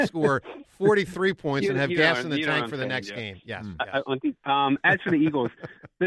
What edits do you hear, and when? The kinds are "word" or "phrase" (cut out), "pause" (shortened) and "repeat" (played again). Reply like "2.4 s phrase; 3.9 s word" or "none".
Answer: none